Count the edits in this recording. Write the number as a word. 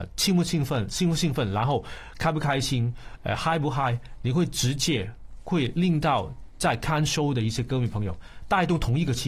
zero